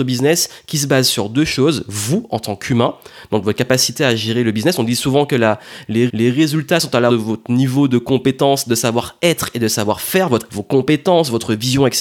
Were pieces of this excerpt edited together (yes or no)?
yes